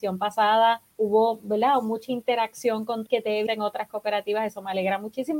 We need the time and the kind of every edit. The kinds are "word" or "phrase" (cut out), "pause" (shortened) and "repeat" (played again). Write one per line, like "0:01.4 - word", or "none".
0:00.9 - pause
0:03.1 - word
0:03.5 - phrase